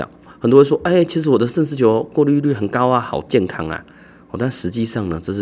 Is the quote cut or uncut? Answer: uncut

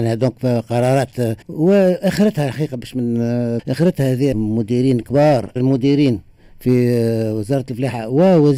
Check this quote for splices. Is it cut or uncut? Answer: cut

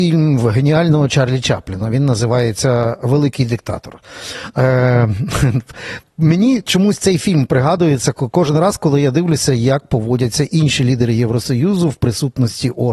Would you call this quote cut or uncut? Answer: uncut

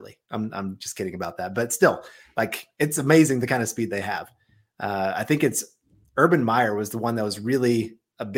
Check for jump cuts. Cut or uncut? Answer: uncut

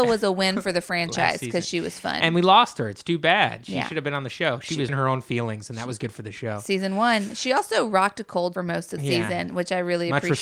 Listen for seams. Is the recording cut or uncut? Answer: cut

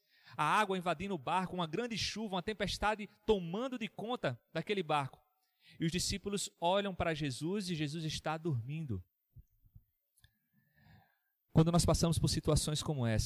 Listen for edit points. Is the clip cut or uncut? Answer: uncut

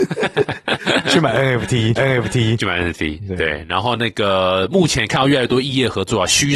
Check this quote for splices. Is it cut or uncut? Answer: cut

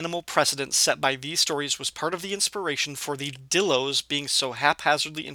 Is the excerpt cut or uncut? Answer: uncut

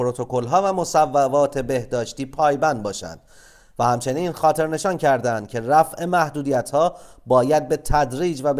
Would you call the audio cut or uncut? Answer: uncut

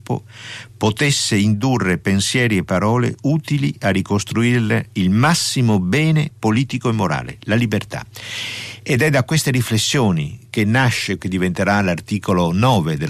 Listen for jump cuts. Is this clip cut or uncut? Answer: cut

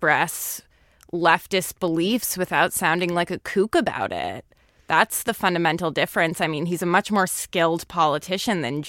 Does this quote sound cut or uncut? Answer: uncut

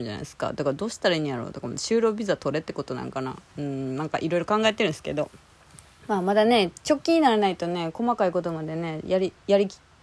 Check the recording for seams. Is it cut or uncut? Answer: uncut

